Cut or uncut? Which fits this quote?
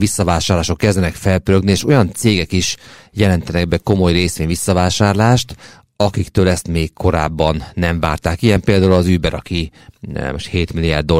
uncut